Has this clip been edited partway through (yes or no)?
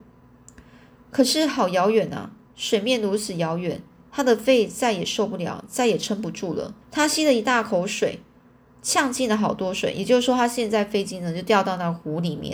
yes